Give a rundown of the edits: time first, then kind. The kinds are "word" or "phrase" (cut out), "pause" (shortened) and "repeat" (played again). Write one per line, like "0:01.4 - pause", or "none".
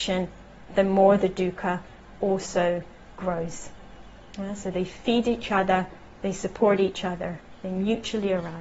none